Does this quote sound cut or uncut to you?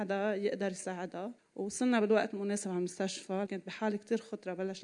cut